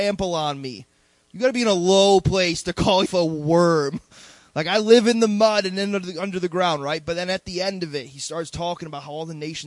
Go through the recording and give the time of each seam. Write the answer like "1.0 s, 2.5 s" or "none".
3.1 s